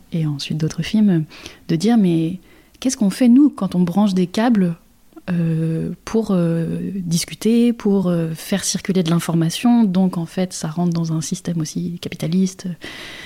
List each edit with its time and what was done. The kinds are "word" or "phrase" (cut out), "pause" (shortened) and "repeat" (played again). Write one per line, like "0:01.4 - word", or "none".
none